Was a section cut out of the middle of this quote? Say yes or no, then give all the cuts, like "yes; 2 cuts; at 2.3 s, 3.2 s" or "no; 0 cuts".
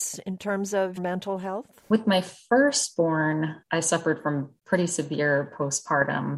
yes; 4 cuts; at 1.0 s, 1.9 s, 3.6 s, 4.6 s